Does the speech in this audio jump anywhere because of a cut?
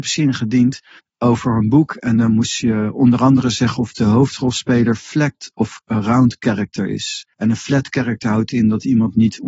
yes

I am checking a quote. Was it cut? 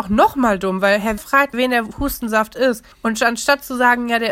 yes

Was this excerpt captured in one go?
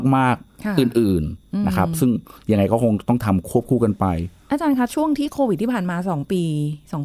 yes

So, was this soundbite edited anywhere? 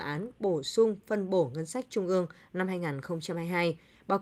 no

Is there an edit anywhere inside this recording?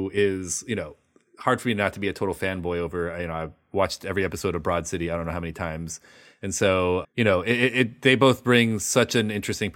yes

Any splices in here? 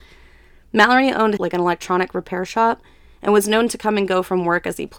yes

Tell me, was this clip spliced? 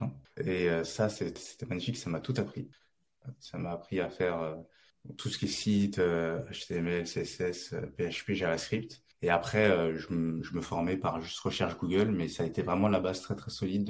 no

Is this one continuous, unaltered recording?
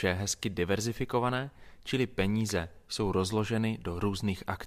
yes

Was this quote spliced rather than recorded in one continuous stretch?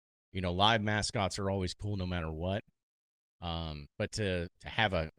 yes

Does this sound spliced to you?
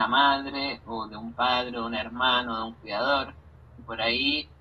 no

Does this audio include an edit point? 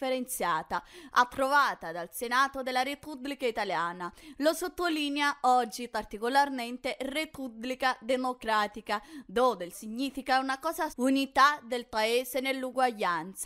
yes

